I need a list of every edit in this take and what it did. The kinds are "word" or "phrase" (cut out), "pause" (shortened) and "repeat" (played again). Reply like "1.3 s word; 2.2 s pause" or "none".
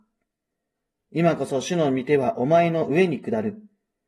none